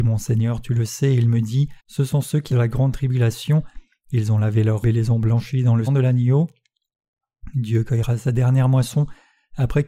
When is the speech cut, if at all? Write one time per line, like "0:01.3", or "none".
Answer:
0:01.8
0:02.5
0:04.8
0:05.9